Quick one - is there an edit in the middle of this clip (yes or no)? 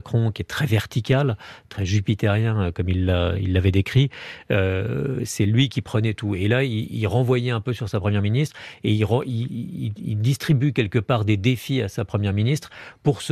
no